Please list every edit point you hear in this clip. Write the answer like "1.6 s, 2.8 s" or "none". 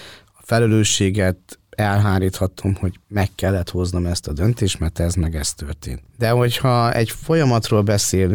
none